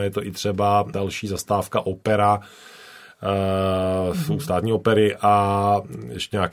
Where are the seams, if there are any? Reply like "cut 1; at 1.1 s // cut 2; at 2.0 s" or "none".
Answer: cut 1; at 0.9 s